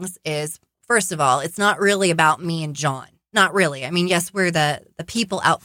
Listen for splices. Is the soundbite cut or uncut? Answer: uncut